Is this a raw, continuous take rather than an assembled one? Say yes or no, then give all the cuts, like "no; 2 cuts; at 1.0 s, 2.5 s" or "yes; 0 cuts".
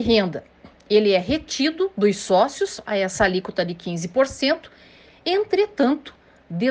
yes; 0 cuts